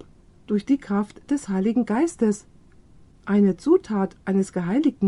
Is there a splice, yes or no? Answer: no